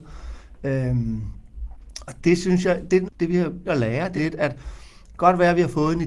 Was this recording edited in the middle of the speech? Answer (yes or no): yes